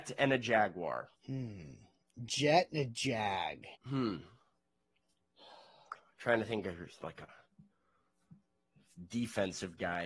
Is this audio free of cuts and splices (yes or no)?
no